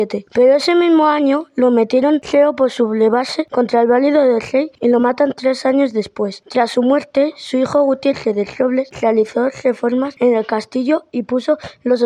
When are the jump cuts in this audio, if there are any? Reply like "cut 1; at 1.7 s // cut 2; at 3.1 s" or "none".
none